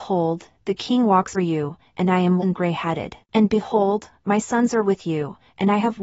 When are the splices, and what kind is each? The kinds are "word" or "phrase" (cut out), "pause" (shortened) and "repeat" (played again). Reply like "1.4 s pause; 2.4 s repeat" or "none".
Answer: 1.3 s word; 2.4 s word; 3.2 s pause